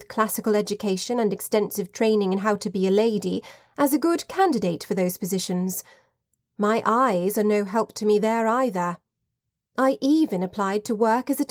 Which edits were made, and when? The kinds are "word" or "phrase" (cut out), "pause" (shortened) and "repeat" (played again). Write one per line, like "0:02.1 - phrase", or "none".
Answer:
none